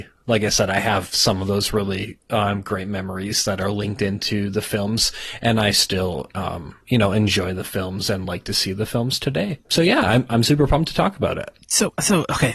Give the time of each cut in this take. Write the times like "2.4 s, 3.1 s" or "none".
none